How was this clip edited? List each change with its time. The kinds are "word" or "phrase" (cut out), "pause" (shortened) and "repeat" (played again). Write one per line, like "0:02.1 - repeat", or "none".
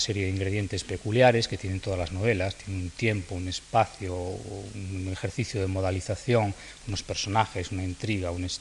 none